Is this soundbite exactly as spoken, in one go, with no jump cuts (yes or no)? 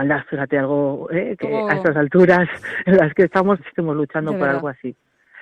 no